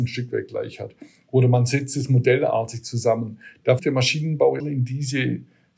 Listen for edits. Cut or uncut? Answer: cut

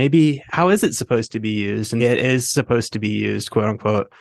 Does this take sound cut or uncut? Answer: cut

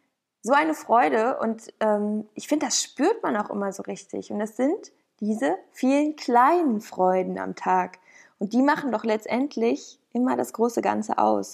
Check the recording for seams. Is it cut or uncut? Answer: uncut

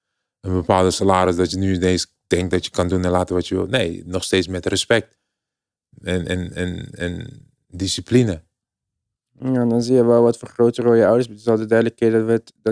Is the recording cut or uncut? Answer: uncut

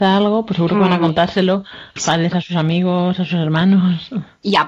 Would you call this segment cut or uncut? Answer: cut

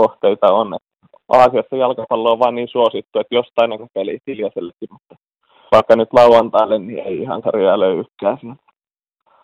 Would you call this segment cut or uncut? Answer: cut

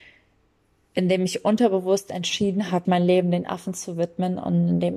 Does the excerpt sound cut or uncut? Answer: cut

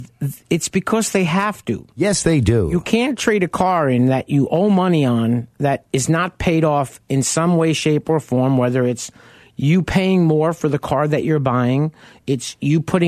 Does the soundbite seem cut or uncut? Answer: uncut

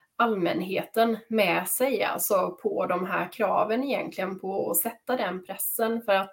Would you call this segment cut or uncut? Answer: uncut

